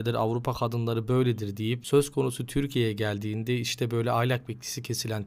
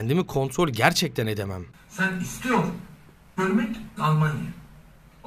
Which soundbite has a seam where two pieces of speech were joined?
second; 2 cuts; at 3.4 s, 4.0 s

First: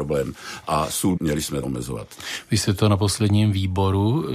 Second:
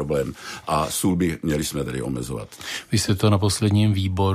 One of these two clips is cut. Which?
first; 2 cuts; at 1.2 s, 1.6 s

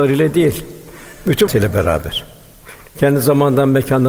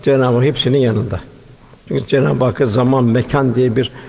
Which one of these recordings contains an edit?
first; 1 cut; at 1.5 s

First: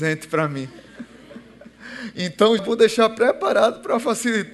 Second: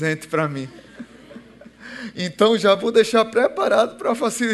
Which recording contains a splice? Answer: first; 1 cut; at 2.6 s

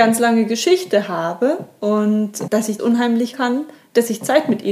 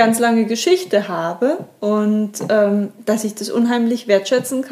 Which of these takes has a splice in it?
first; 3 cuts; at 2.5 s, 2.8 s, 3.3 s

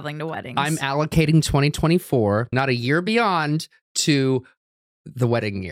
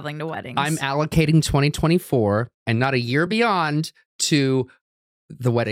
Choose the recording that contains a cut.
first; 1 cut; at 2.5 s

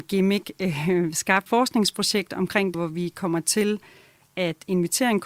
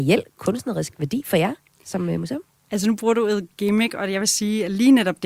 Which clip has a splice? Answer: first; 2 cuts; at 1.5 s, 2.7 s

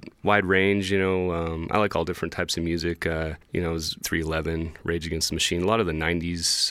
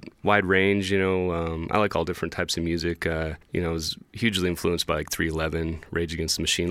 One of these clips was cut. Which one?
first; 1 cut; at 4.0 s

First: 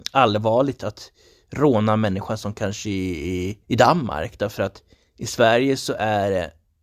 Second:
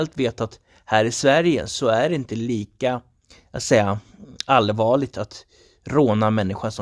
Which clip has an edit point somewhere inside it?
first; 1 cut; at 3.6 s

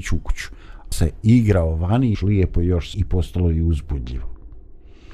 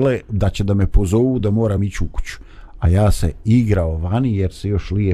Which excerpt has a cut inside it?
first; 3 cuts; at 0.9 s, 2.1 s, 2.9 s

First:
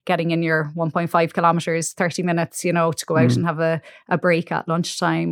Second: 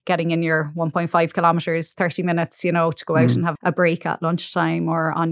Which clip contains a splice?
second; 1 cut; at 3.6 s

